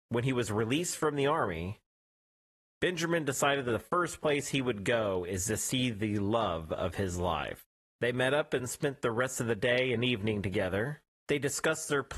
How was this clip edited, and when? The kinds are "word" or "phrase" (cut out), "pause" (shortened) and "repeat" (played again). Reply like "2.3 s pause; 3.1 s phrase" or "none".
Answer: none